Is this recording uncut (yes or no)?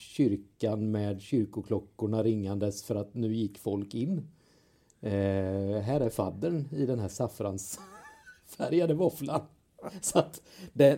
yes